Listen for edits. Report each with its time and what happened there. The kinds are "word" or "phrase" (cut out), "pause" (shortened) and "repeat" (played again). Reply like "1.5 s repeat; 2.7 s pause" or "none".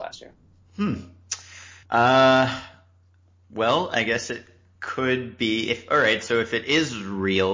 1.8 s pause